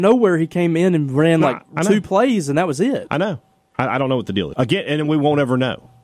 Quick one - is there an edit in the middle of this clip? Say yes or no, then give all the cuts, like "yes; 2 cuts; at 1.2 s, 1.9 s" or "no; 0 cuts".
yes; 2 cuts; at 1.7 s, 4.5 s